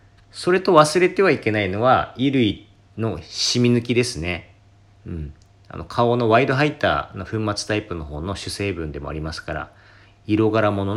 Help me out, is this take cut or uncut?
uncut